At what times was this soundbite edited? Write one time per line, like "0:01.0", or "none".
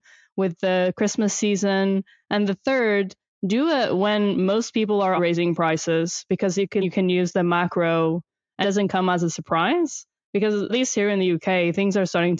0:05.2
0:06.8
0:08.6
0:10.7